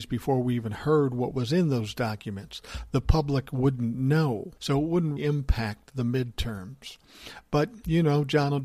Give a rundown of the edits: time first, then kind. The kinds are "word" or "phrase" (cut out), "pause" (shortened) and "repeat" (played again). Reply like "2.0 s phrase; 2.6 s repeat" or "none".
4.6 s pause; 5.2 s word